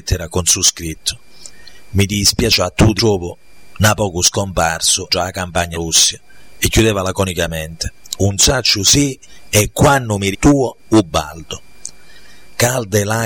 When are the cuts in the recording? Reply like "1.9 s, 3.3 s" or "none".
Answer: 3.0 s, 5.1 s, 5.7 s, 10.3 s